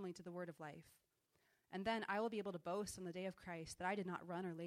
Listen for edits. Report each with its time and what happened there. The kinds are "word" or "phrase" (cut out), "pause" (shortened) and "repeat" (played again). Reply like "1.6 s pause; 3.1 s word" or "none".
none